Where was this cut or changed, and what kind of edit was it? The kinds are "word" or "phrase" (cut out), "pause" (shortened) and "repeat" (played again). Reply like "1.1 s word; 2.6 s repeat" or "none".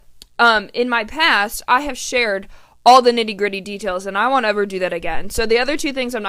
none